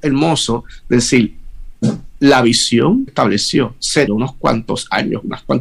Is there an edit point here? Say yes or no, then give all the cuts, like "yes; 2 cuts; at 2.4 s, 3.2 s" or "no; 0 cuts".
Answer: yes; 2 cuts; at 3.1 s, 4.1 s